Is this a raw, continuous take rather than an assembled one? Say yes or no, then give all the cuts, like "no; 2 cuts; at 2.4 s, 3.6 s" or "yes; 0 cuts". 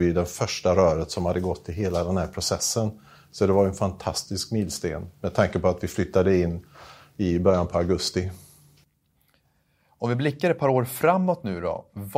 yes; 0 cuts